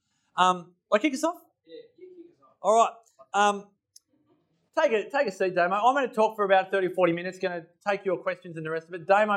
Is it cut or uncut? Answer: uncut